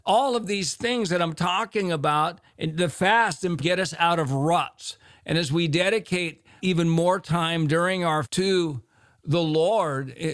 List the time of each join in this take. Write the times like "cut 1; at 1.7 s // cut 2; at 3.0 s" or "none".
cut 1; at 3.6 s // cut 2; at 6.6 s // cut 3; at 8.2 s